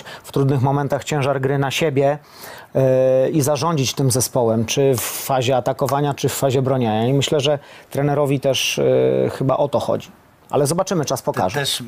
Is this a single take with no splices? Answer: yes; 0 cuts

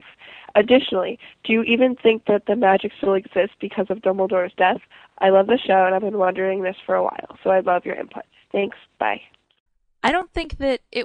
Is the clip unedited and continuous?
yes; 0 cuts

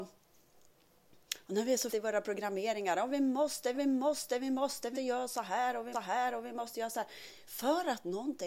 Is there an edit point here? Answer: yes; 4 cuts; at 1.9 s, 3.7 s, 4.9 s, 5.9 s

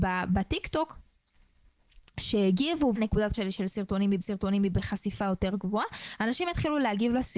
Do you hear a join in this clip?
yes; 3 cuts; at 3.0 s, 3.3 s, 4.2 s

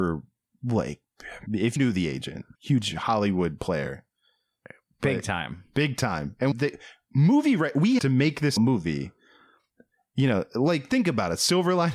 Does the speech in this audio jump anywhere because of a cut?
yes; 6 cuts; at 1.5 s, 1.8 s, 2.5 s, 6.5 s, 8.0 s, 8.6 s

